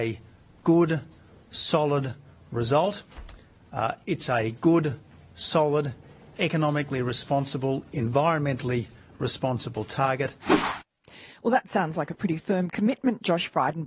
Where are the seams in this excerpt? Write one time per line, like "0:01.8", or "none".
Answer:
none